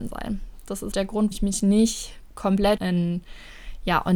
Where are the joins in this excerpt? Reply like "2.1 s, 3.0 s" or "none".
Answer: 0.9 s, 1.3 s, 2.8 s